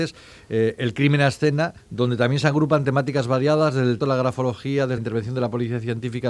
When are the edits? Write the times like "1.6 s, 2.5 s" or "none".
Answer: 1.8 s, 4.0 s, 5.0 s

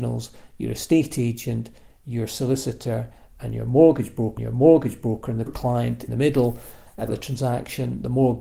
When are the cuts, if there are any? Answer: 4.4 s, 5.5 s, 6.1 s, 7.1 s

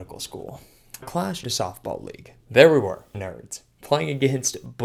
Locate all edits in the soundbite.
1.0 s, 1.4 s, 2.4 s, 3.1 s

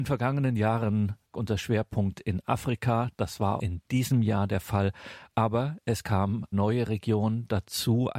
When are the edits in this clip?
1.3 s, 3.6 s, 6.5 s

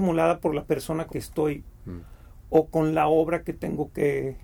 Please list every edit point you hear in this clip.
1.1 s, 1.7 s

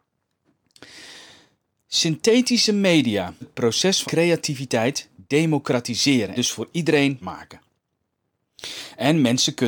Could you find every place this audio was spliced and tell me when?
3.4 s, 4.0 s, 6.4 s, 7.2 s

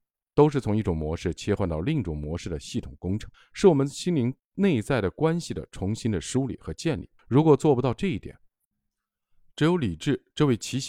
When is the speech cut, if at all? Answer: 3.3 s, 4.4 s, 7.2 s

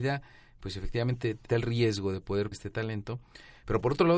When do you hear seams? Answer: 1.5 s, 2.5 s

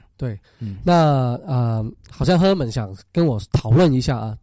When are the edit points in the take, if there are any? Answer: 3.5 s

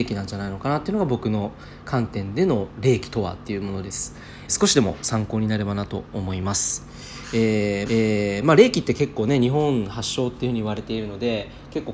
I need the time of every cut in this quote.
4.5 s, 7.9 s

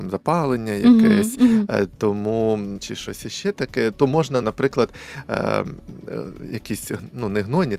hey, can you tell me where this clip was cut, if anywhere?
2.8 s, 4.4 s

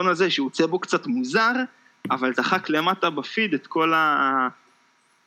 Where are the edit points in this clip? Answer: 2.3 s

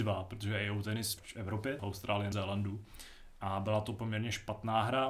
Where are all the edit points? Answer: 1.2 s, 1.8 s, 2.3 s

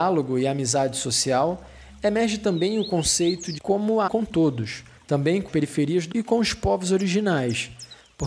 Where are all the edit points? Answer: 3.6 s, 4.1 s, 5.0 s, 5.5 s, 6.1 s

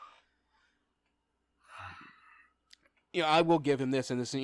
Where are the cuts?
none

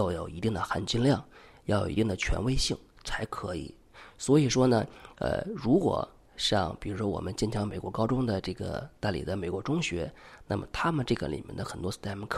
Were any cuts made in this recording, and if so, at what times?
none

